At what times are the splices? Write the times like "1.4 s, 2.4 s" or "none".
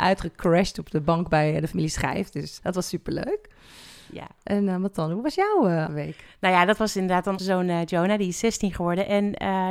2.6 s, 5.9 s, 7.4 s